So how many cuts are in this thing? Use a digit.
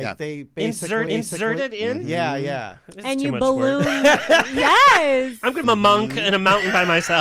2